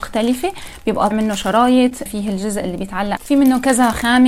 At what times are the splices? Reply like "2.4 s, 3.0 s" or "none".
1.1 s, 2.1 s, 3.2 s